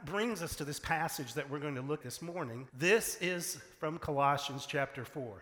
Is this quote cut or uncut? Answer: cut